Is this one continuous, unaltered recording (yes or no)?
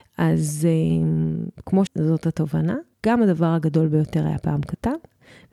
no